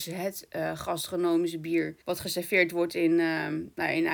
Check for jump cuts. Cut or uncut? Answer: cut